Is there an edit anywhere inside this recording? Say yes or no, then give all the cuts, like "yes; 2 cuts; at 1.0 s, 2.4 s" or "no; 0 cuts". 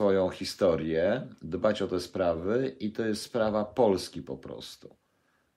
no; 0 cuts